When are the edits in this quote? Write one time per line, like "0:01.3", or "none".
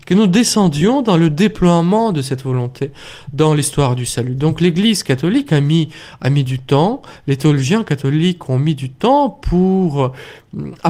none